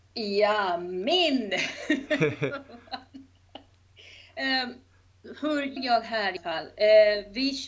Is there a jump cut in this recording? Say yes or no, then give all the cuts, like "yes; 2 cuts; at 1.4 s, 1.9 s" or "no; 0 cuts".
yes; 2 cuts; at 5.8 s, 6.4 s